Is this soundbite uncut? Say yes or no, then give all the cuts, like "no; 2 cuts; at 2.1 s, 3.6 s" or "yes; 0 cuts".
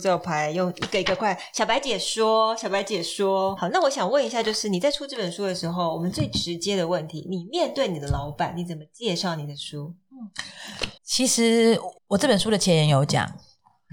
no; 3 cuts; at 3.6 s, 11.0 s, 12.0 s